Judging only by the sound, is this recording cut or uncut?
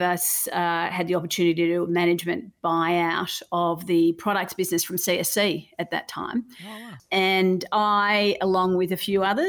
uncut